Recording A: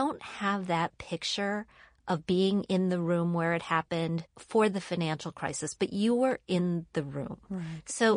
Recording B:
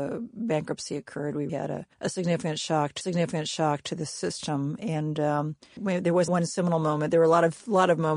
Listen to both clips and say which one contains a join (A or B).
B